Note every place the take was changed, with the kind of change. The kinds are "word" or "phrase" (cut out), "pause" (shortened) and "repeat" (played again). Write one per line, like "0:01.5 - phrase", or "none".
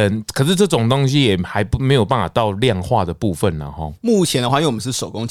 none

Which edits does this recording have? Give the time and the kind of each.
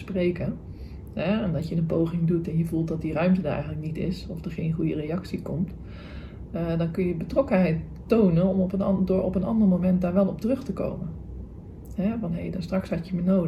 none

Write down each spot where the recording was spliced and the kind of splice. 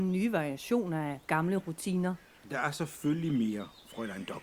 none

